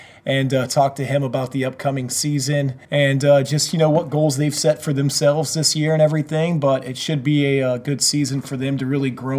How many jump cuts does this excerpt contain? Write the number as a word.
one